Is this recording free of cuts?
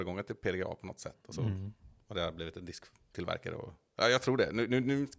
yes; 0 cuts

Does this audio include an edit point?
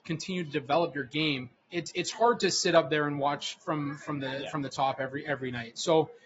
yes; 1 cut; at 1.5 s

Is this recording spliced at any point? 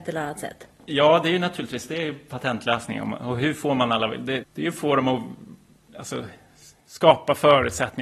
yes; 1 cut; at 4.4 s

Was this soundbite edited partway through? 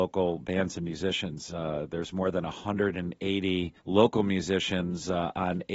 yes; 1 cut; at 3.8 s

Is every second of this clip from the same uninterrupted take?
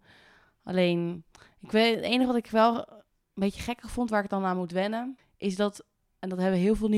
yes; 0 cuts

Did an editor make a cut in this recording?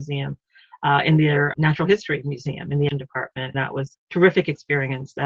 yes; 4 cuts; at 1.5 s, 2.9 s, 3.5 s, 3.9 s

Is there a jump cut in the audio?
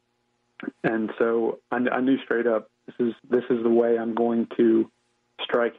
yes; 2 cuts; at 1.6 s, 3.2 s

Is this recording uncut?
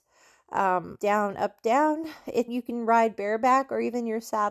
no; 2 cuts; at 1.0 s, 2.5 s

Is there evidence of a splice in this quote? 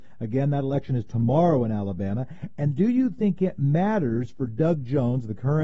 no; 0 cuts

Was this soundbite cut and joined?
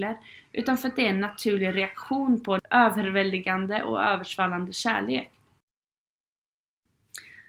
no; 0 cuts

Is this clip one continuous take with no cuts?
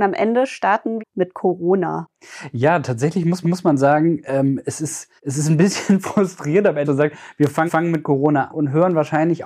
no; 6 cuts; at 1.0 s, 3.4 s, 5.2 s, 6.8 s, 7.7 s, 8.5 s

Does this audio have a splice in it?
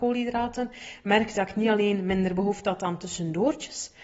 yes; 1 cut; at 1.3 s

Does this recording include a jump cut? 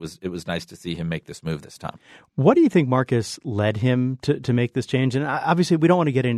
no; 0 cuts

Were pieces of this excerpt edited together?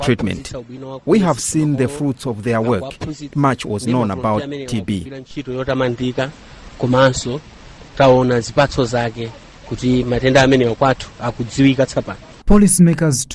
yes; 1 cut; at 3.3 s

